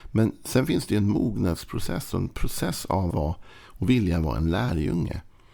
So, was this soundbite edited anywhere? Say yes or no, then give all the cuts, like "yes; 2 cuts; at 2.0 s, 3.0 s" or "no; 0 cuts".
yes; 1 cut; at 3.1 s